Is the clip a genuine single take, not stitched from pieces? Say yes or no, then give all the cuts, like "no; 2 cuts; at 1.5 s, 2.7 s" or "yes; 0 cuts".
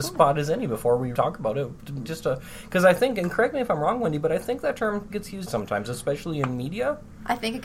no; 4 cuts; at 1.1 s, 2.0 s, 5.1 s, 5.5 s